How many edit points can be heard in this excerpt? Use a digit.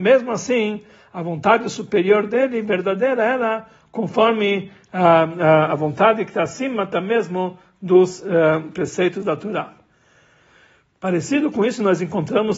0